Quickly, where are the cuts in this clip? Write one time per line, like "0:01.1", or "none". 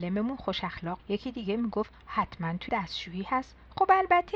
0:01.0
0:02.7